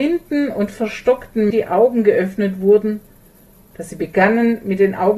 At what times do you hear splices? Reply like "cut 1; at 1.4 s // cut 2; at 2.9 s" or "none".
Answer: cut 1; at 1.5 s